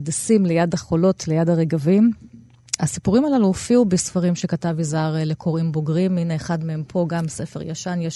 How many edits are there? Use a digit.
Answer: 1